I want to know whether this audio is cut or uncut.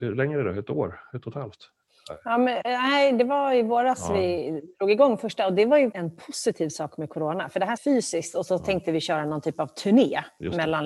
cut